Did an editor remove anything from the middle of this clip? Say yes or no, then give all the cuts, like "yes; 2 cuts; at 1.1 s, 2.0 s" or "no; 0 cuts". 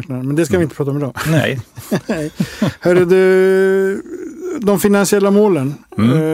no; 0 cuts